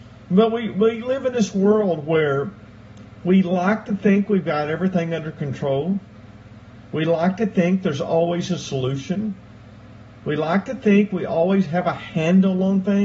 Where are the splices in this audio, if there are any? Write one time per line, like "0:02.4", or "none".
none